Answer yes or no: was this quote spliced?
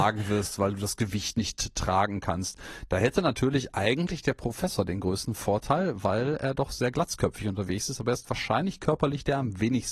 no